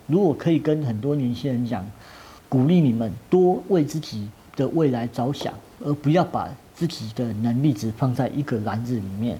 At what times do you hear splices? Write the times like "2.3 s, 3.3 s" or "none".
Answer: 2.4 s